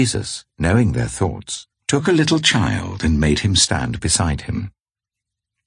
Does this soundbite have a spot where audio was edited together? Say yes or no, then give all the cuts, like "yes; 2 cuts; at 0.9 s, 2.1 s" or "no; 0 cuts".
yes; 1 cut; at 1.7 s